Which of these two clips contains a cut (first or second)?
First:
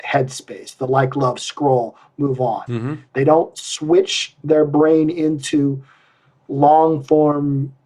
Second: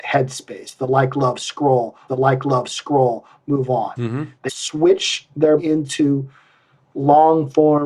second